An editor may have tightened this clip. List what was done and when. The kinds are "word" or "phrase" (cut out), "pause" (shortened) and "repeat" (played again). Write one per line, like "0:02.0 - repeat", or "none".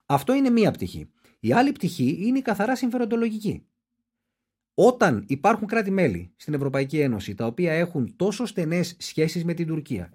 none